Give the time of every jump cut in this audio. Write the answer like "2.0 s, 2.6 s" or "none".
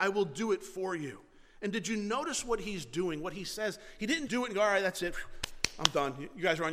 4.3 s